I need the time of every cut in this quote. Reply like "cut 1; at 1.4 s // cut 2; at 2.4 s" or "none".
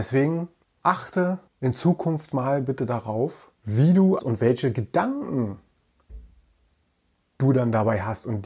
cut 1; at 1.5 s // cut 2; at 3.6 s // cut 3; at 4.2 s

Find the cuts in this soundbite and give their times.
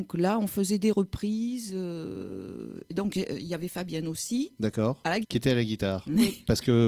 cut 1; at 5.2 s

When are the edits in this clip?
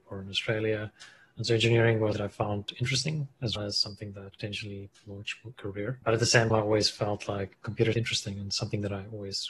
cut 1; at 2.1 s // cut 2; at 3.6 s // cut 3; at 4.4 s // cut 4; at 5.5 s // cut 5; at 6.5 s // cut 6; at 7.9 s

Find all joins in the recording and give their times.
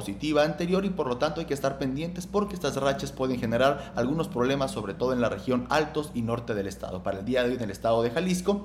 none

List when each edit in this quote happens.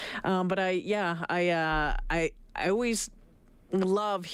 none

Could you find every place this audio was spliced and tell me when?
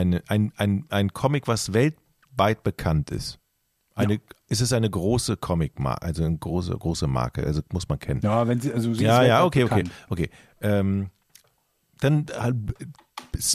none

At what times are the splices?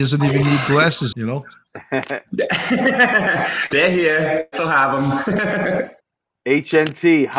cut 1; at 1.1 s // cut 2; at 6.0 s

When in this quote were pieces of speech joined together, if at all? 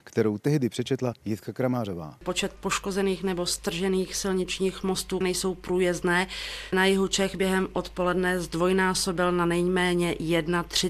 cut 1; at 5.2 s // cut 2; at 6.7 s

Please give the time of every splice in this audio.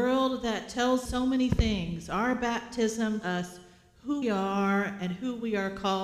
cut 1; at 1.1 s // cut 2; at 3.2 s // cut 3; at 4.2 s

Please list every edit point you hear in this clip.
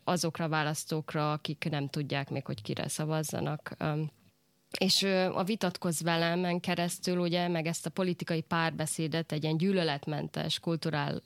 none

